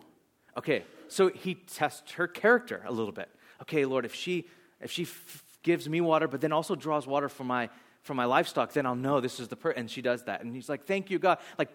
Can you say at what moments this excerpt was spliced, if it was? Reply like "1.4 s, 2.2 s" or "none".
none